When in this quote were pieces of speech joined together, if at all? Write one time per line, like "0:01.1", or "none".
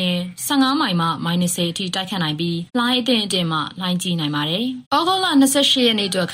0:02.7
0:04.8